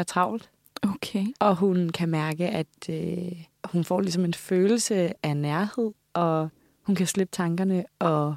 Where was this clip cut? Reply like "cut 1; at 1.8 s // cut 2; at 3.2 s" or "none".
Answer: cut 1; at 1.4 s